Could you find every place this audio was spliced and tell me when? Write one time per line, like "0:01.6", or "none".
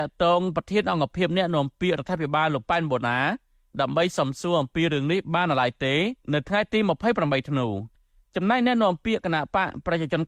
0:06.2